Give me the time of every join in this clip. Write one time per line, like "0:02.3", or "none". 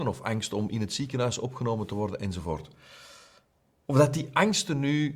none